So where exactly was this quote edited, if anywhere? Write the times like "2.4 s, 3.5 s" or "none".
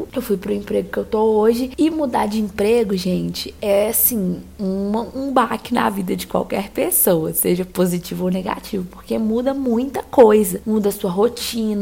none